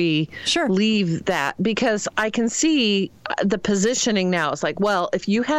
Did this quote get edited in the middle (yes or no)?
no